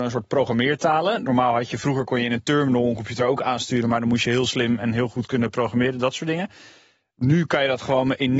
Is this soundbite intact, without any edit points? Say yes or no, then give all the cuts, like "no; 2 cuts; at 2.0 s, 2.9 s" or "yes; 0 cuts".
yes; 0 cuts